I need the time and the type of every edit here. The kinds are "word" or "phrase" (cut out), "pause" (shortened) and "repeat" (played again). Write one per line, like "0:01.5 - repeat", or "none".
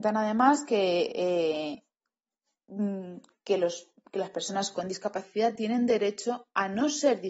none